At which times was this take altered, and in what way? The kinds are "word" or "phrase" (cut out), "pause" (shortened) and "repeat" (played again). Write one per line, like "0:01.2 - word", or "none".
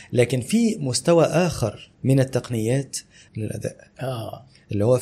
0:01.9 - pause
0:03.3 - phrase